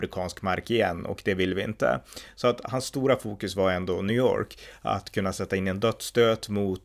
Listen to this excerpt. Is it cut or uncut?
uncut